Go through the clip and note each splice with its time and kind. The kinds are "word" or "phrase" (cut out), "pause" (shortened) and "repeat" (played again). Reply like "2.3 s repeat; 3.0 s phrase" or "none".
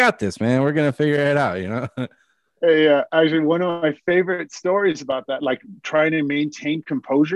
none